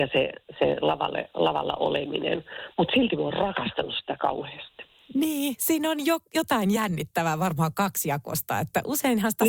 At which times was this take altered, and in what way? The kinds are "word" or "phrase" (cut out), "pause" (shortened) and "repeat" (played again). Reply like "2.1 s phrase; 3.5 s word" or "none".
none